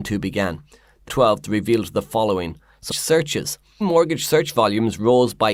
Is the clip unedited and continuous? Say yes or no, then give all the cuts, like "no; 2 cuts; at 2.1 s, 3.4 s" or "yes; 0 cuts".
no; 3 cuts; at 1.1 s, 2.9 s, 3.8 s